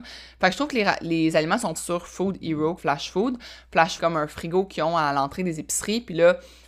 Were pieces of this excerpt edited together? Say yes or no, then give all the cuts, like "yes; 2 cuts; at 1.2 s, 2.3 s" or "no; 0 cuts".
yes; 3 cuts; at 1.8 s, 2.8 s, 4.0 s